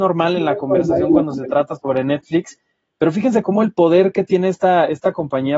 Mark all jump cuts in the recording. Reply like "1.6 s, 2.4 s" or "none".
none